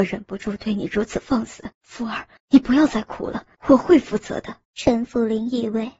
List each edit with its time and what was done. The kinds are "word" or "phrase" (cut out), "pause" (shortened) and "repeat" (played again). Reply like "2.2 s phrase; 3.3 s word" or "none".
1.7 s pause; 2.4 s pause; 3.5 s pause; 4.6 s pause